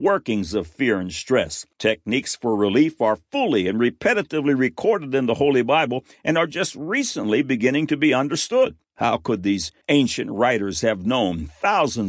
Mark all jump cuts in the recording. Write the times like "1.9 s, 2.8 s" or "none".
1.7 s, 8.8 s, 9.8 s